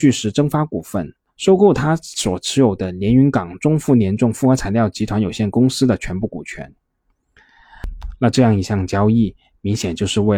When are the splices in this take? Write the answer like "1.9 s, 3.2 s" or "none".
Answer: 1.3 s